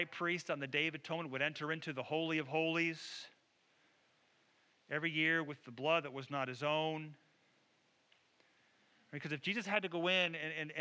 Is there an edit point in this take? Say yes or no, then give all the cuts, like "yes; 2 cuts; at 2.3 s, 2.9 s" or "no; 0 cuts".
no; 0 cuts